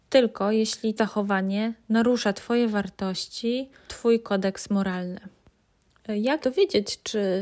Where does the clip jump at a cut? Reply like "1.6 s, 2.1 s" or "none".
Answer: 1.0 s, 3.9 s, 6.4 s